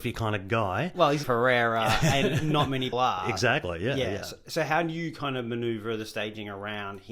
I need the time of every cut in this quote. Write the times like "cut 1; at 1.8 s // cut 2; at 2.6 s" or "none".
cut 1; at 1.2 s // cut 2; at 2.9 s